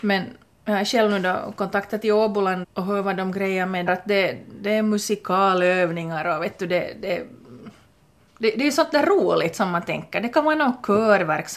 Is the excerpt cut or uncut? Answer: cut